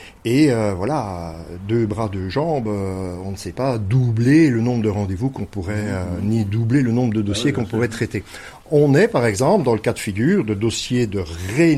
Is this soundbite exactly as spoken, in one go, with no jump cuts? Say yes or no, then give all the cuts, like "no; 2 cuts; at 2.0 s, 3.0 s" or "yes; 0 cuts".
yes; 0 cuts